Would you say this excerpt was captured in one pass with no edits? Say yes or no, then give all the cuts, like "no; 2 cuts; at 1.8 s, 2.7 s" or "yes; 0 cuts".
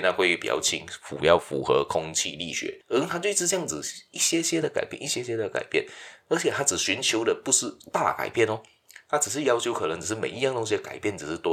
yes; 0 cuts